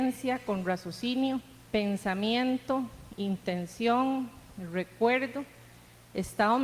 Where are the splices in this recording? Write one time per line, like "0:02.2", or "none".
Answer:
0:01.7